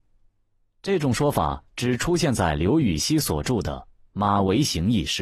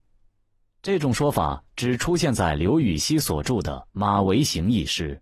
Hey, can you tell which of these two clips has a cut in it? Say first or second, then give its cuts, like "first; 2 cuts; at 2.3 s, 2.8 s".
second; 1 cut; at 3.9 s